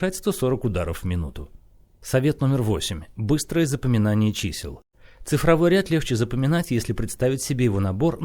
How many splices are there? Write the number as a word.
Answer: zero